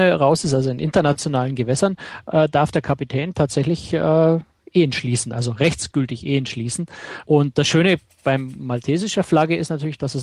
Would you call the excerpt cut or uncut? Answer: uncut